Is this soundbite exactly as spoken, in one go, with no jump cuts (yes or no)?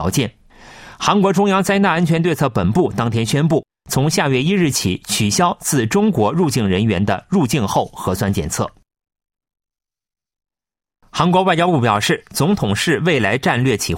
yes